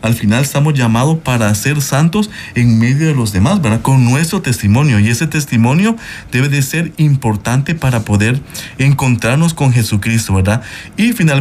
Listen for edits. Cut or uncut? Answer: uncut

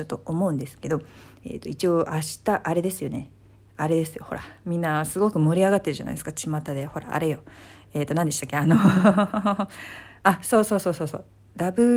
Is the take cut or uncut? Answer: uncut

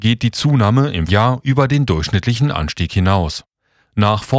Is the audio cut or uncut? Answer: cut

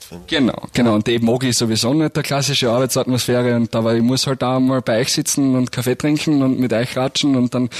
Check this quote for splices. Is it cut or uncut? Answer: uncut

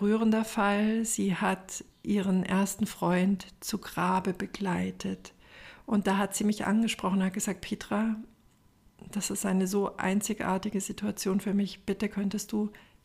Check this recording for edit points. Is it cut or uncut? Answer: uncut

